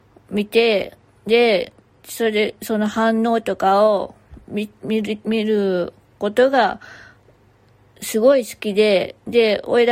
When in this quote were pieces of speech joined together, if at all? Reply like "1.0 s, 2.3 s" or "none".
none

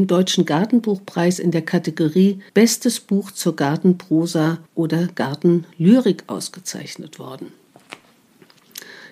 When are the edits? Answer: 2.5 s, 4.7 s

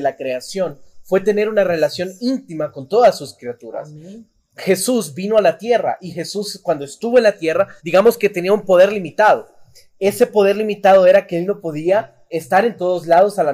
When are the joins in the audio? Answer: 7.8 s, 12.3 s

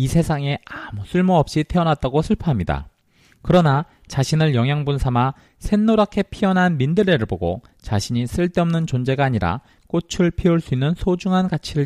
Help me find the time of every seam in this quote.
none

